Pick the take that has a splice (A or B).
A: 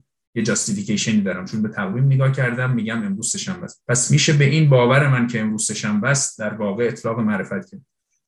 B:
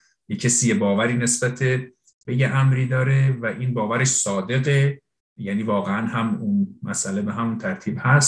A